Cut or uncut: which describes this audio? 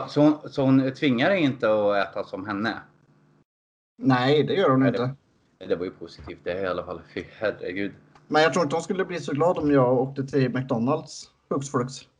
uncut